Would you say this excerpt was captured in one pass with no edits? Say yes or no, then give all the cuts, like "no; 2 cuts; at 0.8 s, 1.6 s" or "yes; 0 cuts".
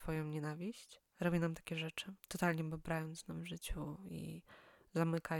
no; 2 cuts; at 1.1 s, 2.2 s